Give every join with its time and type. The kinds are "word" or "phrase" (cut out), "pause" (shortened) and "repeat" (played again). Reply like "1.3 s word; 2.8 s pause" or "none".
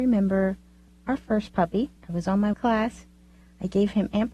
2.0 s pause; 2.5 s phrase